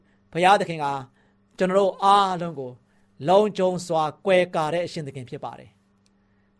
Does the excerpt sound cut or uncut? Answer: uncut